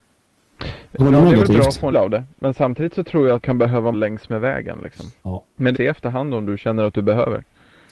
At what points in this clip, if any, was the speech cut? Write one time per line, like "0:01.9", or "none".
0:01.0
0:01.9
0:03.4
0:03.9
0:05.2
0:05.7